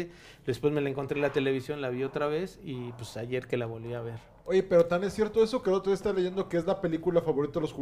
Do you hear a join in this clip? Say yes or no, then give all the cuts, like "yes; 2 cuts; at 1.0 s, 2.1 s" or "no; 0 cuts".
no; 0 cuts